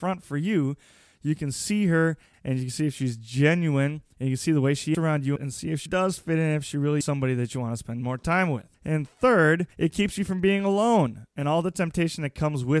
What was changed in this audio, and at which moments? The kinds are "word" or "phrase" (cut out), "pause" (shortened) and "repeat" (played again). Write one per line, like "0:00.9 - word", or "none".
0:02.3 - word
0:04.9 - word
0:05.4 - phrase
0:05.9 - word
0:07.0 - word
0:08.7 - pause
0:09.7 - pause